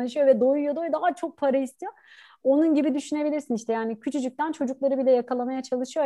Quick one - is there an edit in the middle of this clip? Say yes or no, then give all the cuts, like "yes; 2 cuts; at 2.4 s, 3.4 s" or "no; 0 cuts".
no; 0 cuts